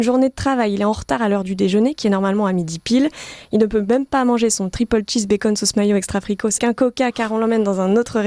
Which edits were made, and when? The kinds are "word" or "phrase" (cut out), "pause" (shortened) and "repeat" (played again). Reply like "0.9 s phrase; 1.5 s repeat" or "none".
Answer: 6.6 s word